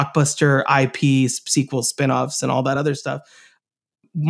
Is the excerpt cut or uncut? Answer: uncut